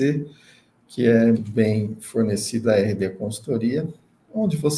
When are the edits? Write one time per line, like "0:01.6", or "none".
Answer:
0:01.3
0:02.6